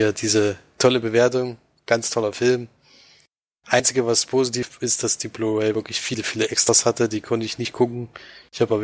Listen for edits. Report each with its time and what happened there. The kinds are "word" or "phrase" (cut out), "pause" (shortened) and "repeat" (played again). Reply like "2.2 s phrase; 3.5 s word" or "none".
1.8 s pause